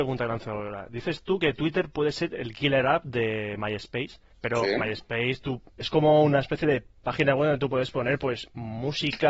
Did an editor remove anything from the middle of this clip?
yes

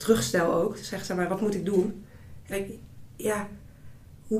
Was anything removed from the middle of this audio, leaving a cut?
yes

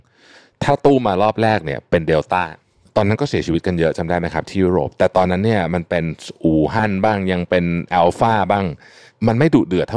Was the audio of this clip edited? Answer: no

